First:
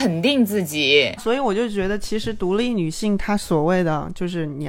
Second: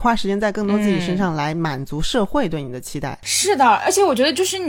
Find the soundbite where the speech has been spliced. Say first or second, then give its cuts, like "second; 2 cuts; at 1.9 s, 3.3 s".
first; 1 cut; at 1.2 s